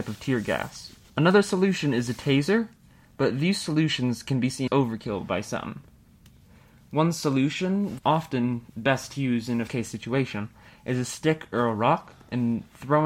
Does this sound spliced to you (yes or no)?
yes